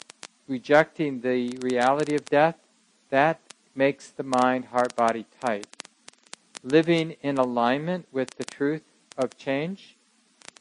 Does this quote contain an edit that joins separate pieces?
no; 0 cuts

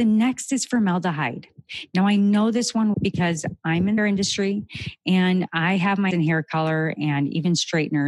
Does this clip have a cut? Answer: yes; 3 cuts; at 2.9 s, 4.0 s, 6.1 s

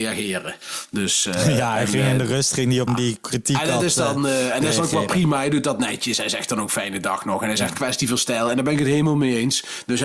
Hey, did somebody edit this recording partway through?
yes; 1 cut; at 2.9 s

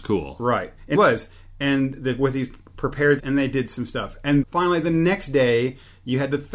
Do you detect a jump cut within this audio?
yes; 3 cuts; at 0.9 s, 3.2 s, 4.4 s

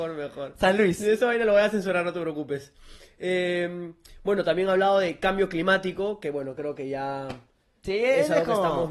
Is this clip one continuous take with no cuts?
yes; 0 cuts

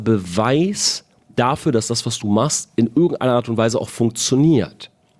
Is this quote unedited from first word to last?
yes; 0 cuts

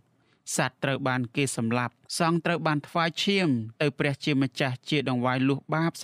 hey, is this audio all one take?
no; 2 cuts; at 2.0 s, 3.7 s

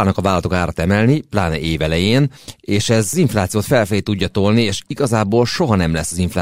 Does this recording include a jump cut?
no; 0 cuts

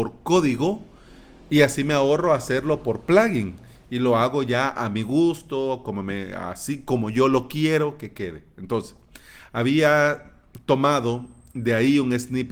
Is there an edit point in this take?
no; 0 cuts

